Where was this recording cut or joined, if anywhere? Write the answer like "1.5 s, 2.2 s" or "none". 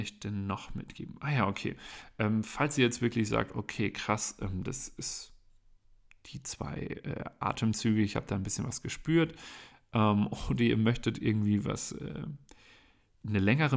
none